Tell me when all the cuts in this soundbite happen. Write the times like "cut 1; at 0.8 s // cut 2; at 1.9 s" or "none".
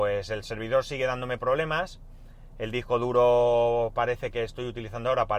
none